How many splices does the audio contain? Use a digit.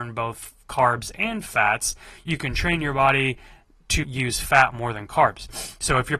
1